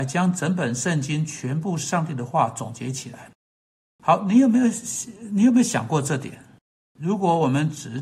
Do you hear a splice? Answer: no; 0 cuts

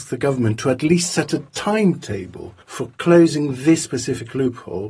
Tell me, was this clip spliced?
yes; 1 cut; at 2.6 s

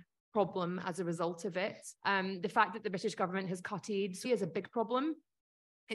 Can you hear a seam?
yes; 2 cuts; at 1.9 s, 4.2 s

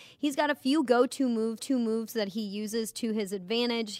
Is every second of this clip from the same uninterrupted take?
no; 1 cut; at 1.6 s

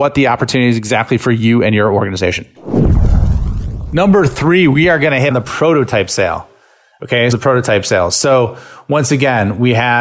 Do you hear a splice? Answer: yes; 2 cuts; at 5.3 s, 7.3 s

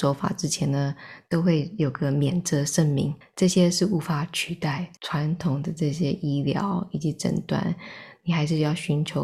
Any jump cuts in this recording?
yes; 2 cuts; at 3.2 s, 5.0 s

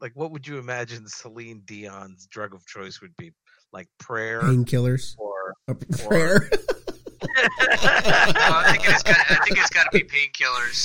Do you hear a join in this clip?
no; 0 cuts

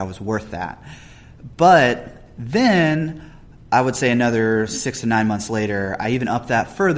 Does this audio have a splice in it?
no; 0 cuts

